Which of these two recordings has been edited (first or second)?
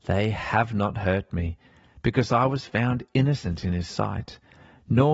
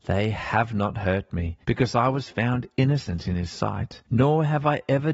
second